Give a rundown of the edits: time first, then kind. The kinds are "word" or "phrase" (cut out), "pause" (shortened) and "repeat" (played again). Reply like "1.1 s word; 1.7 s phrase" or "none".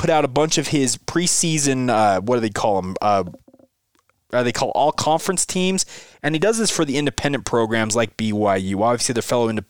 none